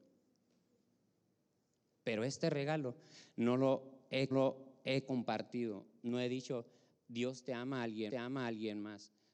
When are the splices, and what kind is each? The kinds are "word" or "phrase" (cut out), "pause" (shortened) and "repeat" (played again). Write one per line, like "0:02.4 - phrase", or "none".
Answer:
0:04.3 - repeat
0:08.1 - repeat